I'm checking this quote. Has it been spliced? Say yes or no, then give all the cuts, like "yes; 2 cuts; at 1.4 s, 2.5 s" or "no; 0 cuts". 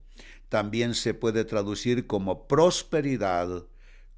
no; 0 cuts